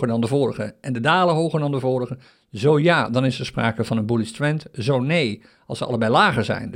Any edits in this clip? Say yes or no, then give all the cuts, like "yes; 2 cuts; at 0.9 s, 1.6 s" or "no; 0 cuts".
no; 0 cuts